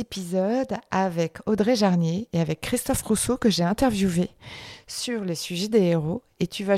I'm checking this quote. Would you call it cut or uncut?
uncut